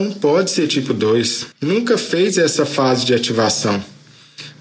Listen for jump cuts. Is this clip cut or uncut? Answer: cut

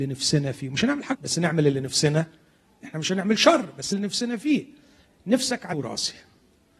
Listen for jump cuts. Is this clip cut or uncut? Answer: cut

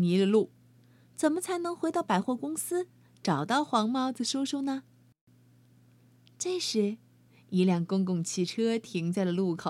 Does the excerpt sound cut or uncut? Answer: uncut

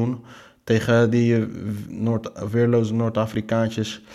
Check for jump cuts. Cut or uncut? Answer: uncut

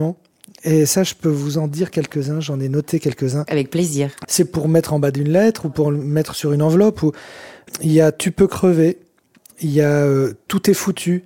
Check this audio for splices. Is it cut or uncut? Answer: uncut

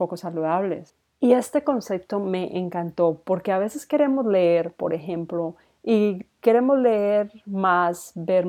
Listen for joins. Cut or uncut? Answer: uncut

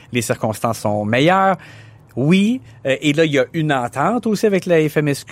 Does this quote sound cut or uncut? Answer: uncut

